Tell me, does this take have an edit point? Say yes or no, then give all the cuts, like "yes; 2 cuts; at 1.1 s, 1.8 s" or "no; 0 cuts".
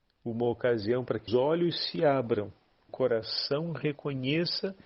yes; 2 cuts; at 1.3 s, 2.9 s